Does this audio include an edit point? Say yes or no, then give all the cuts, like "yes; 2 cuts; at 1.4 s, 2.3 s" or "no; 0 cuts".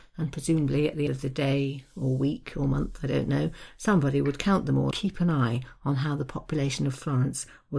yes; 2 cuts; at 1.1 s, 4.9 s